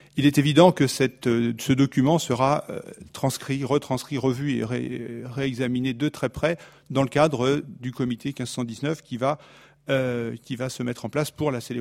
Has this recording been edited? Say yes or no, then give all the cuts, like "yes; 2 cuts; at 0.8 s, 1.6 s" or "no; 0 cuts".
no; 0 cuts